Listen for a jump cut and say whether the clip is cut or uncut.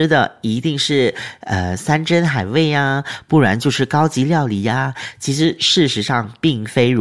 uncut